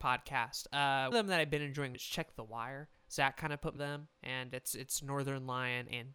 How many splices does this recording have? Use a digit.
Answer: 5